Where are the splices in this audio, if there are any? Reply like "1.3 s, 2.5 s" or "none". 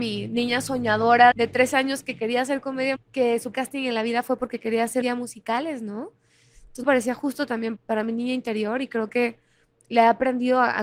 1.3 s, 3.0 s, 3.5 s, 5.0 s, 6.8 s, 7.8 s